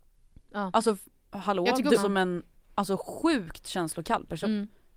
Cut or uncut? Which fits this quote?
cut